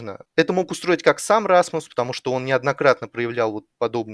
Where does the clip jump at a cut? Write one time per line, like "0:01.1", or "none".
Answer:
none